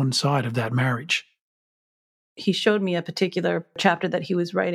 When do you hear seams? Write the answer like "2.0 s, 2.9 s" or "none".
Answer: none